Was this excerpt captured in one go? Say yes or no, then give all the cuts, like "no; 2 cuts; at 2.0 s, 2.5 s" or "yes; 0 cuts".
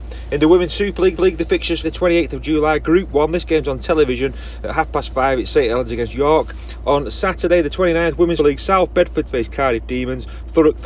no; 4 cuts; at 1.2 s, 1.8 s, 8.4 s, 9.3 s